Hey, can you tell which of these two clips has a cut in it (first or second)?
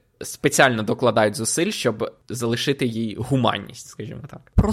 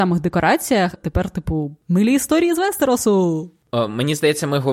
second